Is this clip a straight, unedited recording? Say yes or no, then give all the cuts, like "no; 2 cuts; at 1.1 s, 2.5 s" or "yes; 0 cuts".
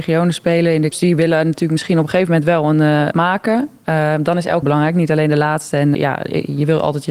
no; 4 cuts; at 0.9 s, 3.1 s, 4.6 s, 5.9 s